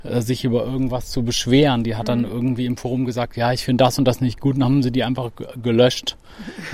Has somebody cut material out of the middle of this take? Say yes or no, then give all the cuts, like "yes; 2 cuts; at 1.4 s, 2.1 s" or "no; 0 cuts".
no; 0 cuts